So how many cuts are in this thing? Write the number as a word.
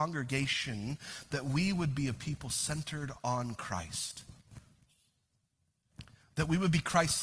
zero